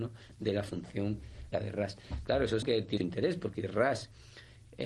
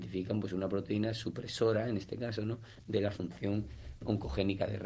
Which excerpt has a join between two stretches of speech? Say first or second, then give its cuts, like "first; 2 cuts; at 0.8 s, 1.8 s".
first; 4 cuts; at 1.5 s, 2.6 s, 3.0 s, 3.6 s